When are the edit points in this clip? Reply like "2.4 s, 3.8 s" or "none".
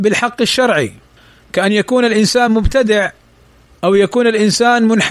2.5 s